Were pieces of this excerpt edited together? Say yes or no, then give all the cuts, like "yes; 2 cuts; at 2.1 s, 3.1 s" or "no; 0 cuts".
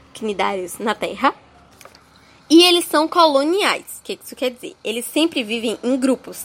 no; 0 cuts